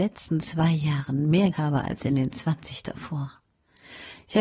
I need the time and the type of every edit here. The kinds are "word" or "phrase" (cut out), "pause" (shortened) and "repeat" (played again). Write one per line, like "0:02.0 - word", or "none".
0:01.5 - word

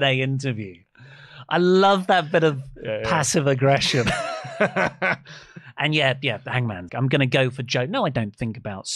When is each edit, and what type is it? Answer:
0:06.9 - word

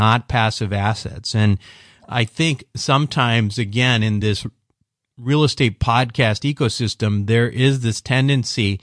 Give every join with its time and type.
none

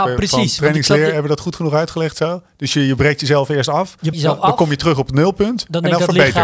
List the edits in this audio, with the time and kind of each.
0:04.1 - word

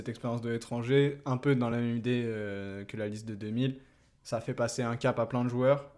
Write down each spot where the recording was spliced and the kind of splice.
none

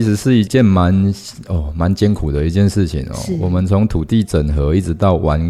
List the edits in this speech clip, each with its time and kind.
none

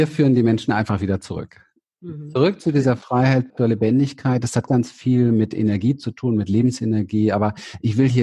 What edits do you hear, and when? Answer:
0:03.5 - word
0:04.7 - word

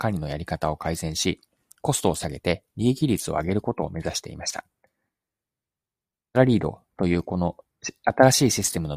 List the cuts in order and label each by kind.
none

